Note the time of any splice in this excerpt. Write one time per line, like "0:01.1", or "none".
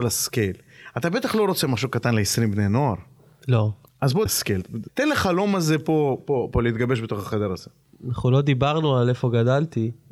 0:04.3